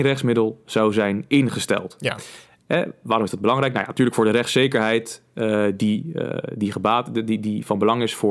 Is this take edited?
no; 0 cuts

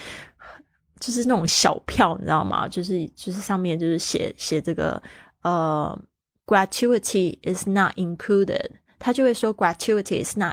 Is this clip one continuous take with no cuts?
no; 1 cut; at 6.2 s

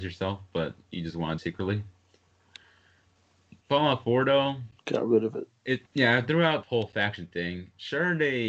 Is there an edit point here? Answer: yes; 5 cuts; at 1.4 s, 3.6 s, 4.8 s, 5.9 s, 6.6 s

